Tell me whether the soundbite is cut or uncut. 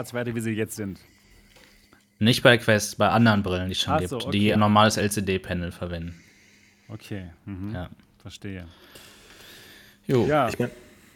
cut